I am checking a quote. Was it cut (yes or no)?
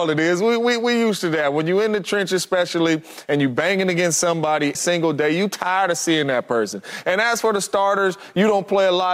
yes